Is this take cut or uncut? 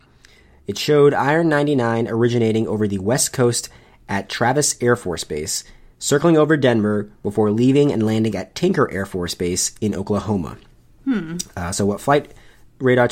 uncut